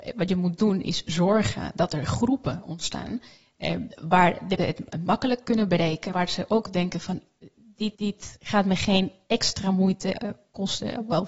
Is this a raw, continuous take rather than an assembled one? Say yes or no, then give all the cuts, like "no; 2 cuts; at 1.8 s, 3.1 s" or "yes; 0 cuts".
no; 4 cuts; at 3.9 s, 4.6 s, 6.1 s, 7.9 s